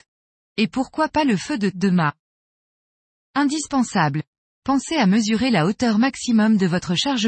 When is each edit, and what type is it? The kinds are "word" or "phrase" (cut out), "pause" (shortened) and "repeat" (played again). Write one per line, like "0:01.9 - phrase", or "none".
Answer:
0:01.7 - word